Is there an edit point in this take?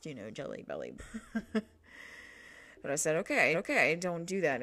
yes; 2 cuts; at 1.0 s, 3.5 s

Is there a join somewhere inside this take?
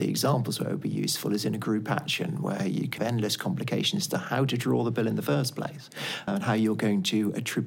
yes; 2 cuts; at 3.0 s, 6.3 s

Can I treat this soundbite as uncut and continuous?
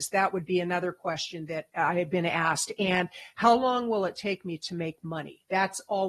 no; 1 cut; at 1.7 s

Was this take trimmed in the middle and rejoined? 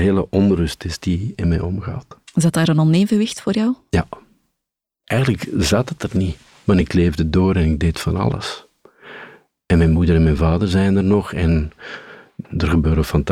no; 0 cuts

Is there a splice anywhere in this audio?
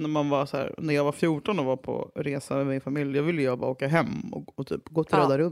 no; 0 cuts

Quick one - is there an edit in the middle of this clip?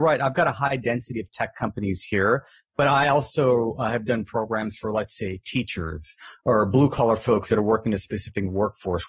no; 0 cuts

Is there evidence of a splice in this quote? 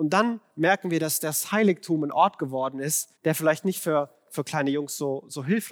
yes; 1 cut; at 3.2 s

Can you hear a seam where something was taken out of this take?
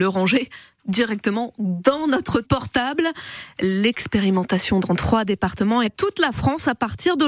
yes; 2 cuts; at 2.4 s, 5.8 s

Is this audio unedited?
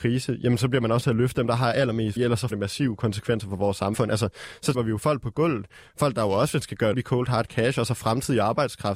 no; 6 cuts; at 1.0 s, 2.2 s, 2.5 s, 4.7 s, 6.6 s, 6.9 s

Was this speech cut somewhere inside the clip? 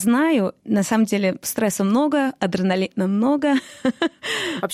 no; 0 cuts

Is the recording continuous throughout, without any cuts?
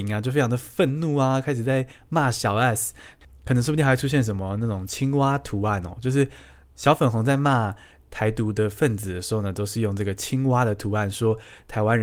yes; 0 cuts

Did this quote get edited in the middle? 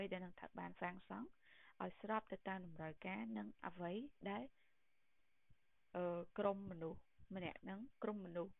no; 0 cuts

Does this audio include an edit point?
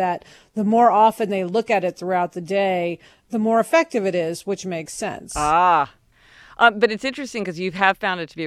no; 0 cuts

